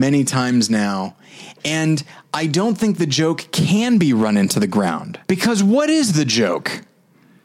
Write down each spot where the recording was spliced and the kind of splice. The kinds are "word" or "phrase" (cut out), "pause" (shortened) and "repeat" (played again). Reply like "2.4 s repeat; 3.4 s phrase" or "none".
5.2 s pause